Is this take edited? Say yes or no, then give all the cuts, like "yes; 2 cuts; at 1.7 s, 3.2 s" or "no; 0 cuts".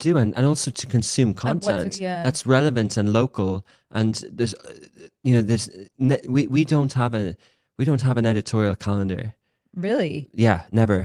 no; 0 cuts